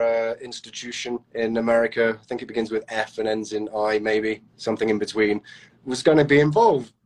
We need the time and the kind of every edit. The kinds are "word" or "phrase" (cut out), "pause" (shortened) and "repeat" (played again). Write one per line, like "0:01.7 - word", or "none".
0:01.2 - pause
0:04.5 - pause